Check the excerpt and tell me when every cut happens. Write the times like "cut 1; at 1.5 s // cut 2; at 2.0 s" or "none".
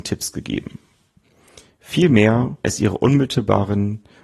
cut 1; at 2.6 s